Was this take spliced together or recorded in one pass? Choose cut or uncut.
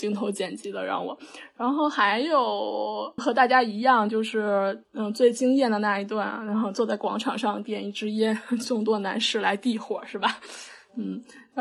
cut